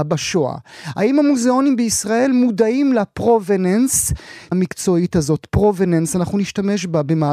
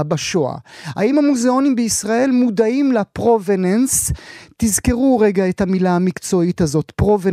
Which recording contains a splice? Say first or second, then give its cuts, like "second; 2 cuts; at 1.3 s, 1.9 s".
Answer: first; 1 cut; at 4.5 s